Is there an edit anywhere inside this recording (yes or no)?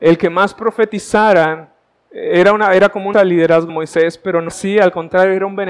yes